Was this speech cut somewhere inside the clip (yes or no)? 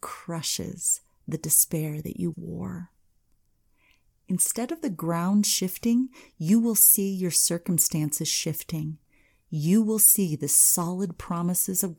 yes